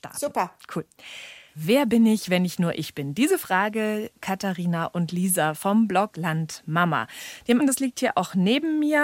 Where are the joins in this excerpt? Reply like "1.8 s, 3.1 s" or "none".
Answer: 4.1 s, 6.1 s, 7.6 s